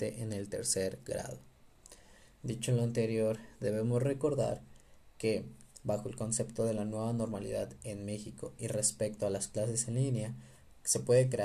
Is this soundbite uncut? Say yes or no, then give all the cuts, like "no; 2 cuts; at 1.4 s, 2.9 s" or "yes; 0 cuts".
yes; 0 cuts